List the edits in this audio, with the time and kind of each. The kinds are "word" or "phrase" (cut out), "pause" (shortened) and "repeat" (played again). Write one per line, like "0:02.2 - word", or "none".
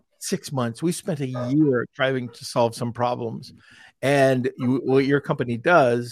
none